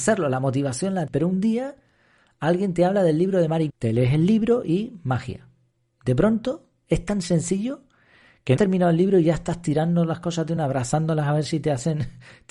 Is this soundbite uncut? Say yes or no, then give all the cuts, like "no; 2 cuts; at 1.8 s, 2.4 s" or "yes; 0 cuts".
no; 4 cuts; at 1.1 s, 3.7 s, 8.6 s, 10.6 s